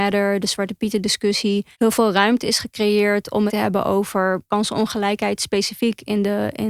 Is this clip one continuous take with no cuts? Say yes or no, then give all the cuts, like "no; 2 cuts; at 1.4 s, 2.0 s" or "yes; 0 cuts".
no; 3 cuts; at 1.7 s, 3.5 s, 4.5 s